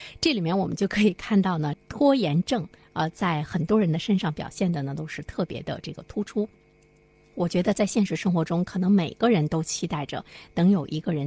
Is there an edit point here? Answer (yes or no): no